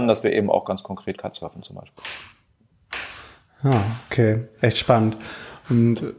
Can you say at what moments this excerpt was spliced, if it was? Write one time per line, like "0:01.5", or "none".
none